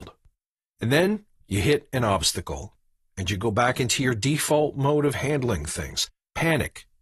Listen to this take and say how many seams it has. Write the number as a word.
zero